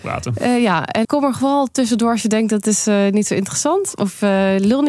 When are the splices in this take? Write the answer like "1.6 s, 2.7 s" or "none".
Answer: 1.0 s